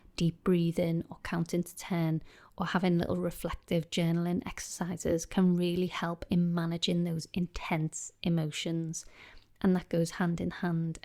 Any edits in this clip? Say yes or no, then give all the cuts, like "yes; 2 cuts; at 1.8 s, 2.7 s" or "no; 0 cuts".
no; 0 cuts